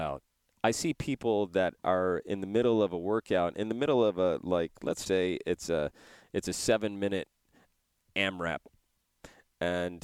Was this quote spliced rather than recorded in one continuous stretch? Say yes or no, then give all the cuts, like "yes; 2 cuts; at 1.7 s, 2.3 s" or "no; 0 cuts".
yes; 1 cut; at 5.1 s